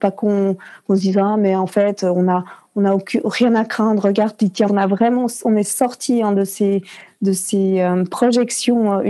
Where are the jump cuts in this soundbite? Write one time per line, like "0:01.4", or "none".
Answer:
0:04.7

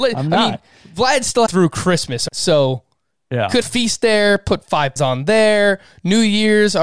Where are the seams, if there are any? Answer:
0:01.5
0:02.3
0:03.6
0:05.0

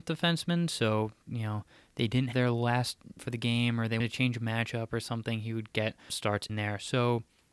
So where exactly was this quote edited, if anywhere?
0:01.2
0:02.3
0:03.2
0:04.0
0:06.1
0:06.5

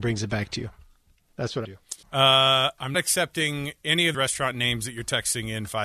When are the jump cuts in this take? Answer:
0:01.6
0:02.0
0:02.9
0:04.1

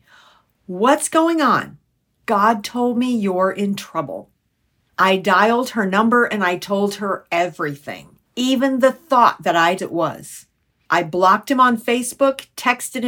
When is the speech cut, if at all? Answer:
0:08.3
0:09.8

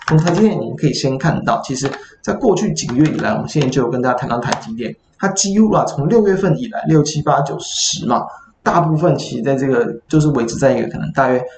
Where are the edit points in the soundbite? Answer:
none

